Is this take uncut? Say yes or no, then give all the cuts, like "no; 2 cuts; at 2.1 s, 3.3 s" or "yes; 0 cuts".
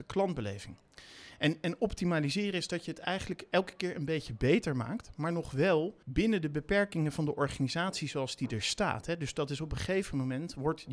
no; 1 cut; at 6.0 s